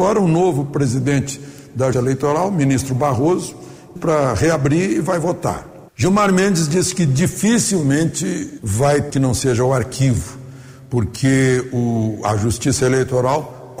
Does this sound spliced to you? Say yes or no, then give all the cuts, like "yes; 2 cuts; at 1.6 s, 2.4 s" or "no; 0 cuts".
yes; 5 cuts; at 1.9 s, 4.0 s, 5.9 s, 8.6 s, 9.1 s